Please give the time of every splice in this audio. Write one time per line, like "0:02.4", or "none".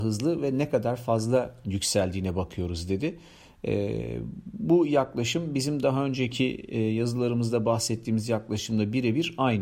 none